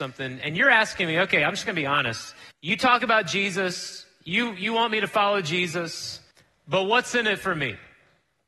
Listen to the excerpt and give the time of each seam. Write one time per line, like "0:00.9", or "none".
0:02.5
0:06.3